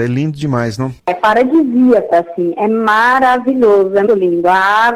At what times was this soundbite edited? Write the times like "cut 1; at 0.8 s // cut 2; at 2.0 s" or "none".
cut 1; at 1.0 s // cut 2; at 2.1 s // cut 3; at 4.1 s